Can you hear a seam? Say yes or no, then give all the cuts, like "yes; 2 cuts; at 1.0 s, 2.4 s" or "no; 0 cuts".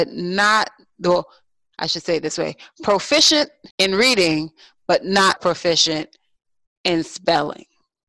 yes; 2 cuts; at 3.7 s, 5.4 s